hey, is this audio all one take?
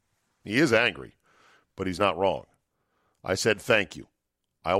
yes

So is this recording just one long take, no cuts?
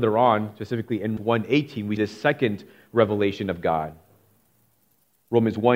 no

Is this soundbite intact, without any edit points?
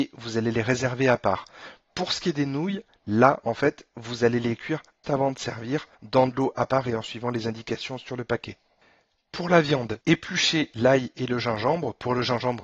no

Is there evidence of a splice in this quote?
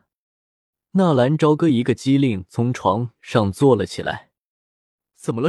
no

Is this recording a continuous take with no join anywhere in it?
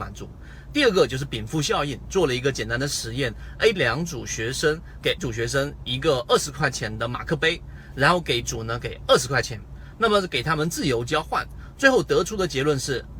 no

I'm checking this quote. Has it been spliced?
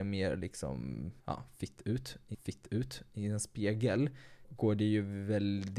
yes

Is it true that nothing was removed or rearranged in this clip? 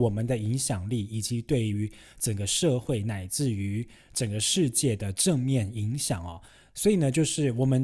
yes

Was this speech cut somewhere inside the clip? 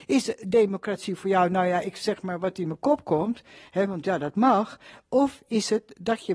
no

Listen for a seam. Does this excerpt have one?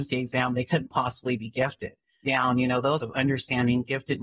yes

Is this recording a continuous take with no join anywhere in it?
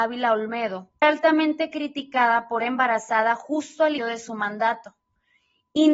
no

